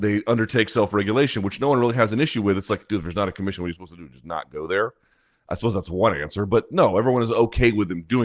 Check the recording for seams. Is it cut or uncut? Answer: uncut